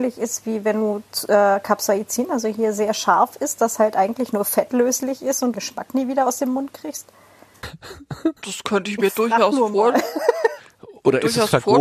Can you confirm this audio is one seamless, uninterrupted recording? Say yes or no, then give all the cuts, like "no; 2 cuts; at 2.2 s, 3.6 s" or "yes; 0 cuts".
no; 3 cuts; at 3.7 s, 5.5 s, 8.4 s